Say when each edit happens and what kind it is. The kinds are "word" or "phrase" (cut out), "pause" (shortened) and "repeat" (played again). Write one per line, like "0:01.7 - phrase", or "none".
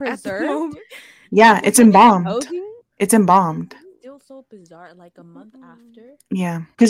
none